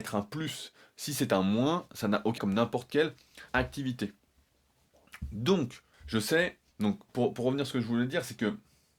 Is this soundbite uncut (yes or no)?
no